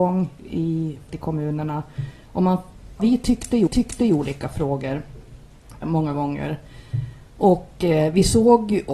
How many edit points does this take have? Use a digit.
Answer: 4